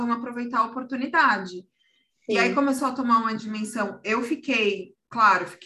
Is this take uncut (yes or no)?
yes